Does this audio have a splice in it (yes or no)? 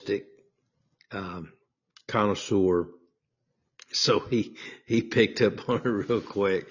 no